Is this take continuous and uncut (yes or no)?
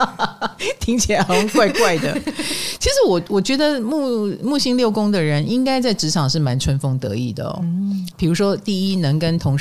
no